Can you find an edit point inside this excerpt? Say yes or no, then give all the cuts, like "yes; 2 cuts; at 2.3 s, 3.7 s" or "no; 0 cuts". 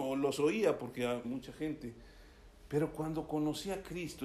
yes; 1 cut; at 1.2 s